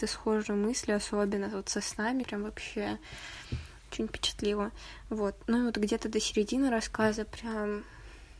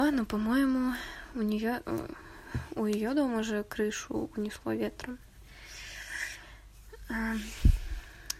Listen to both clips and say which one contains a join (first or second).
first